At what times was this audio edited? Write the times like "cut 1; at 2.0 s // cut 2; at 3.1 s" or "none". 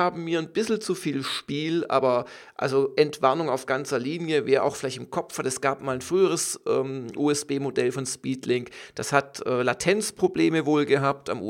none